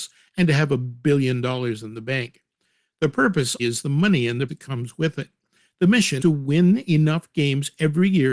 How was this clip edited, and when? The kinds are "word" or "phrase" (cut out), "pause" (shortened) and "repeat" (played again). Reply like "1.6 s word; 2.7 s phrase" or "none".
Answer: 3.6 s word; 4.5 s word; 6.2 s word